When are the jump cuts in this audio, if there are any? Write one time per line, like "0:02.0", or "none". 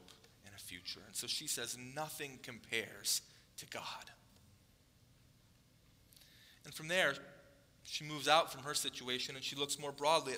none